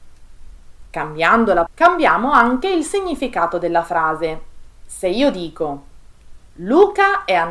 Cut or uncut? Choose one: cut